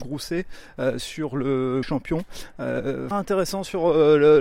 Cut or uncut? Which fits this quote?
cut